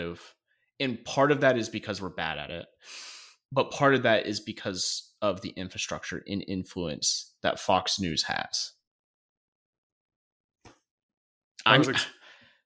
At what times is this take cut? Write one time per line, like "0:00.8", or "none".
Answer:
none